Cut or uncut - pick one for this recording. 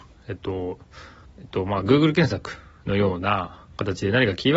cut